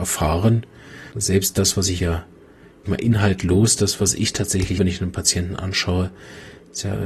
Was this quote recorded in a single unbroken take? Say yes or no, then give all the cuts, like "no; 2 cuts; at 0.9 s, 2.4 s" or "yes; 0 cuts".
no; 4 cuts; at 1.1 s, 2.0 s, 2.9 s, 4.8 s